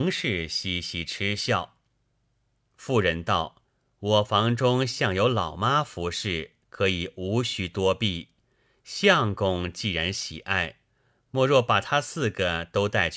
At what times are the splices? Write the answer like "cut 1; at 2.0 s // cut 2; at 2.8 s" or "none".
cut 1; at 3.7 s // cut 2; at 6.6 s